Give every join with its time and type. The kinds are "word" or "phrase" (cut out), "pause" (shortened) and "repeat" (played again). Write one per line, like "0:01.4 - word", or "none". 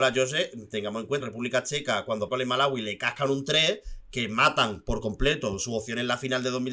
0:01.2 - word
0:02.3 - word